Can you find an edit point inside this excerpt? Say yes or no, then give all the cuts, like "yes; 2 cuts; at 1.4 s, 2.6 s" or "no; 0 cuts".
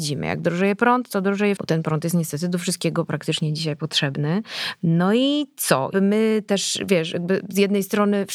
yes; 2 cuts; at 1.6 s, 5.9 s